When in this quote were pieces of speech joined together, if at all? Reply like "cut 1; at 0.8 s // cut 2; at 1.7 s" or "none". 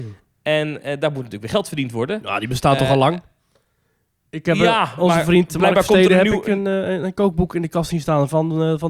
none